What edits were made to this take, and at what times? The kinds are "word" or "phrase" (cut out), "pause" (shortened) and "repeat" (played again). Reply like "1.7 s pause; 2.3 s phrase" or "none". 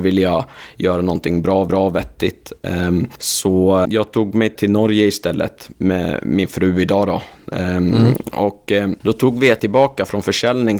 1.7 s repeat; 3.9 s word; 4.6 s word; 9.0 s pause; 9.6 s word